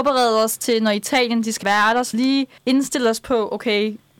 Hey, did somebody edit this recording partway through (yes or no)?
yes